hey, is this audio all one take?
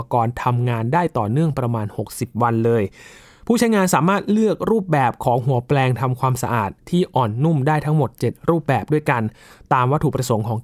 yes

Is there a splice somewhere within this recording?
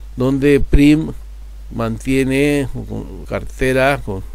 yes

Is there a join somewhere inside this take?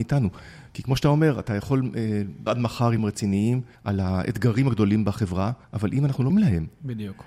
yes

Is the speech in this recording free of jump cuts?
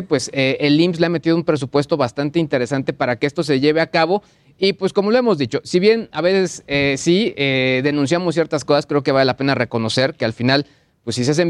yes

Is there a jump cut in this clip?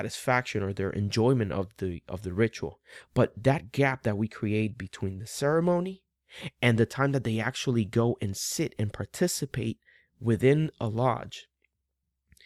no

